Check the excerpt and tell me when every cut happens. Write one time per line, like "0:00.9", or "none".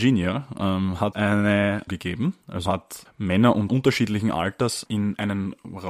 0:01.1
0:01.9
0:02.7
0:03.1
0:03.7
0:04.9